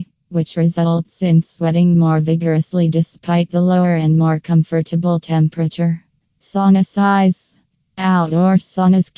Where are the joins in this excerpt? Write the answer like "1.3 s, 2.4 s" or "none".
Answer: none